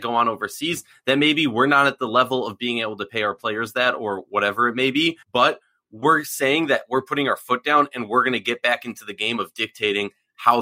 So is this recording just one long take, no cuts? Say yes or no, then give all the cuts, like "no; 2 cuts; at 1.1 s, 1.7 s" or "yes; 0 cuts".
no; 1 cut; at 5.2 s